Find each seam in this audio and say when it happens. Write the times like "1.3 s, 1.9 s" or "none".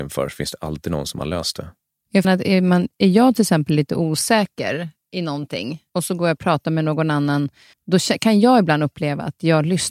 2.2 s, 5.9 s, 7.7 s